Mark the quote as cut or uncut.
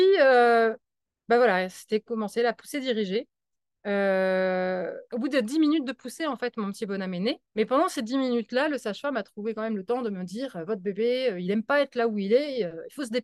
uncut